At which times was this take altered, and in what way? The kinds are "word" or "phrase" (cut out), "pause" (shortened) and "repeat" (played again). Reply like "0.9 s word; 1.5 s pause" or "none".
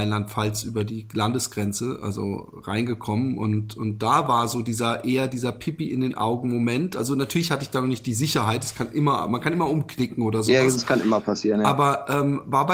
none